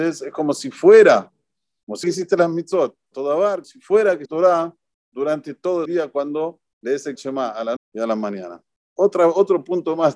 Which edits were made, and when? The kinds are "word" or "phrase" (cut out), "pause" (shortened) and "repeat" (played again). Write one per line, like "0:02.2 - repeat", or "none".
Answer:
0:02.0 - word
0:03.1 - word
0:03.6 - word
0:04.3 - word
0:05.9 - word
0:07.2 - word
0:07.8 - word